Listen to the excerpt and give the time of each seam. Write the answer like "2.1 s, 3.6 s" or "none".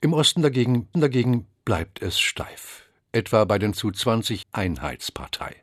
0.9 s, 3.7 s, 4.4 s